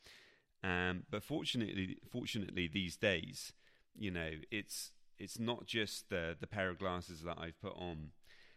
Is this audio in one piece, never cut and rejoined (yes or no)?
no